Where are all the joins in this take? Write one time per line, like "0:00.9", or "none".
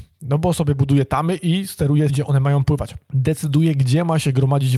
0:02.1